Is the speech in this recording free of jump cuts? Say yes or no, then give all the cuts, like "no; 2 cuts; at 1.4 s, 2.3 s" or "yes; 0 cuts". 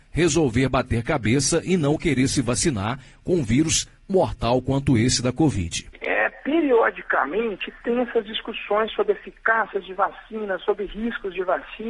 no; 1 cut; at 4.1 s